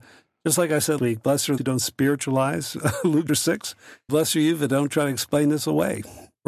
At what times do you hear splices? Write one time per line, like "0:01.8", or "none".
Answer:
0:01.0
0:01.6
0:03.3
0:04.1